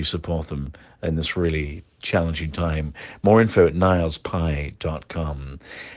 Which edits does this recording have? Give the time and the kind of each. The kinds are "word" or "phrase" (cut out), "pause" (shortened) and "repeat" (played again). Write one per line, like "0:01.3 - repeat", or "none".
none